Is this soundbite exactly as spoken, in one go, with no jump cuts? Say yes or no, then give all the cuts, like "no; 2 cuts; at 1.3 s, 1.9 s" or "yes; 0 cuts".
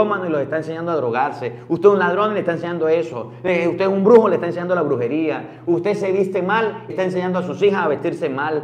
no; 1 cut; at 6.9 s